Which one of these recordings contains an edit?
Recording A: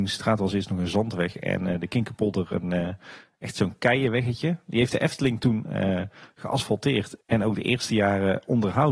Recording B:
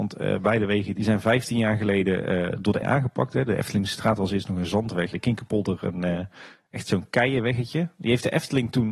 B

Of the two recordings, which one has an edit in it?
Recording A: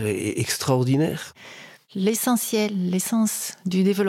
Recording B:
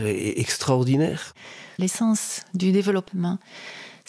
B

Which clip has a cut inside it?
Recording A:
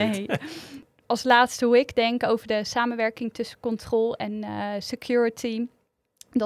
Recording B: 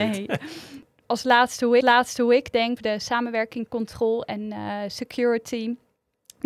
B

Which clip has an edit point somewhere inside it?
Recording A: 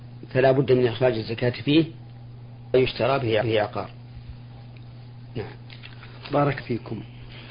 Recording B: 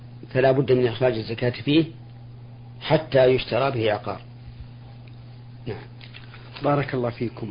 A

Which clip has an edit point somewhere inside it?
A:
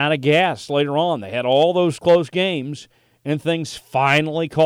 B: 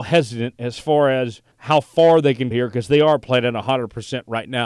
B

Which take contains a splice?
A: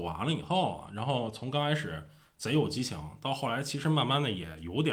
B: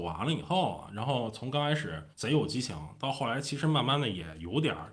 B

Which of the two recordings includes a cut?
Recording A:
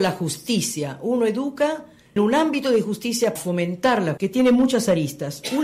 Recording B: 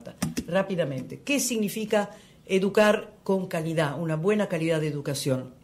A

